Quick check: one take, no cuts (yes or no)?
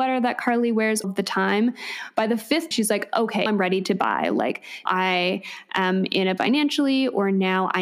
no